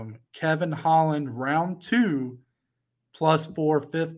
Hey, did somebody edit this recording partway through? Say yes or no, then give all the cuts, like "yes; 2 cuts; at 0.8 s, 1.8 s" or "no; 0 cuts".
no; 0 cuts